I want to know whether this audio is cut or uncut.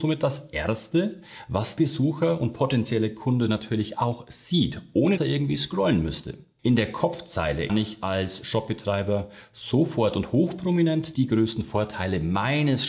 cut